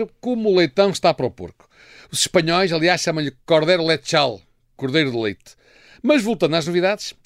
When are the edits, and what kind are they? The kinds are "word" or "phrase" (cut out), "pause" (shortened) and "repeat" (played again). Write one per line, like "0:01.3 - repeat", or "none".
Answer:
none